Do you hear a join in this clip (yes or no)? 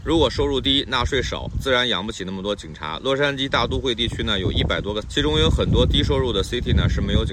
yes